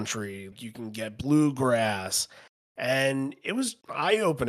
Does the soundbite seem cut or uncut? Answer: uncut